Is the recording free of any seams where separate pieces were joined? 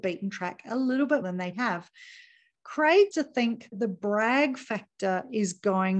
no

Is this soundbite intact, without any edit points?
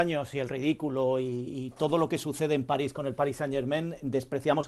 yes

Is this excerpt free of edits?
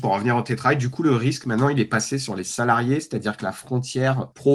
yes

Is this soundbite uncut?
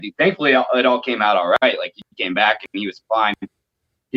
yes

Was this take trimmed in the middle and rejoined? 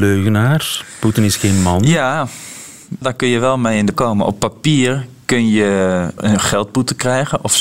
yes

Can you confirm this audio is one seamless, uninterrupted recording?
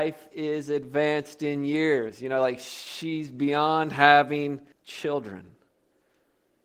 no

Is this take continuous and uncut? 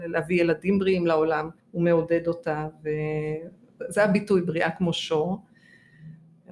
no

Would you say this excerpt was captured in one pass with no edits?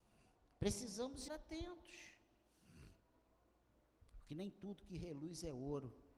no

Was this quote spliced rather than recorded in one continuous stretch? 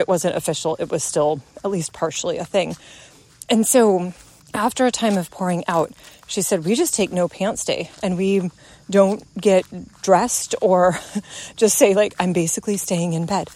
yes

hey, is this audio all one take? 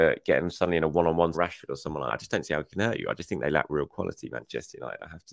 no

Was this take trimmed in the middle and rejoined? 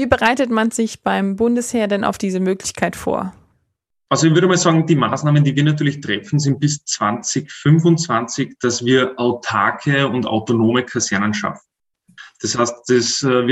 no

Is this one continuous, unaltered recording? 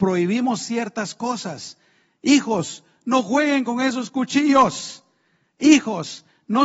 yes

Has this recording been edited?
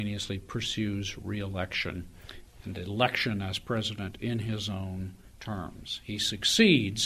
no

